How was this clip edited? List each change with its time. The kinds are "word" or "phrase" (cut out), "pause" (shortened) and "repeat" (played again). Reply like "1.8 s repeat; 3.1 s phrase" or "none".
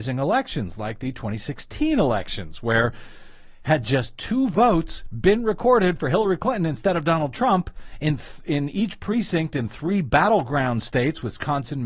none